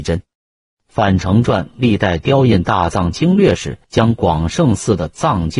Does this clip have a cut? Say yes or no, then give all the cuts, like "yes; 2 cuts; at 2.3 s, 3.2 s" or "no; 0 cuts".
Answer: yes; 1 cut; at 3.8 s